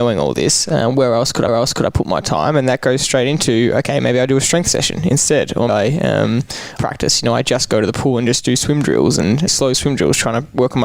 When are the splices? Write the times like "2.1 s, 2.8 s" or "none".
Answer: 1.5 s, 5.7 s, 6.8 s, 9.5 s

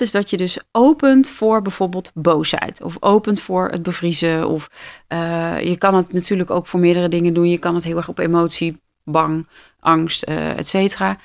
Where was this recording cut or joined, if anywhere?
none

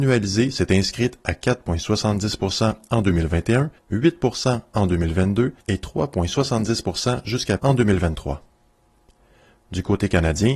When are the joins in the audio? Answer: 3.8 s, 5.6 s, 7.6 s

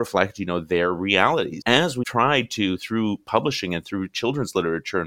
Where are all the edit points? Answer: 1.6 s, 2.0 s

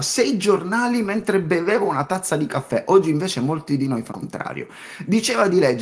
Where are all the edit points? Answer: 4.1 s

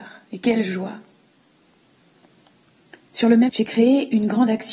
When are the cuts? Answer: 3.5 s

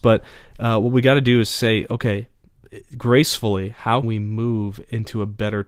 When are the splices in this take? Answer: 4.0 s

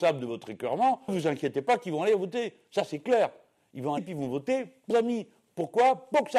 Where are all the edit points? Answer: 1.1 s, 4.0 s, 4.9 s

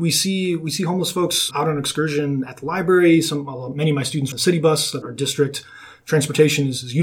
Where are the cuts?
1.5 s, 4.3 s, 5.0 s

